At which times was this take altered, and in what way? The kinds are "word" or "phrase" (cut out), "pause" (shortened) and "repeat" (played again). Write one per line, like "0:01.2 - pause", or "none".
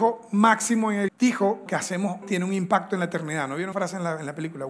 0:01.1 - word
0:01.7 - word
0:02.2 - word
0:03.7 - word